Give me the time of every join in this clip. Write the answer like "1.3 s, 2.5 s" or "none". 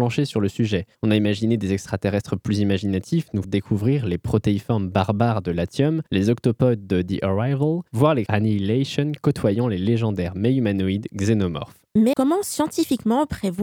0.9 s, 3.4 s, 6.1 s, 7.9 s, 8.3 s, 12.1 s